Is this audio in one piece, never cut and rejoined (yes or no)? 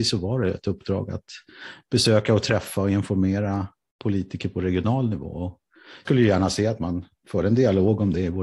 no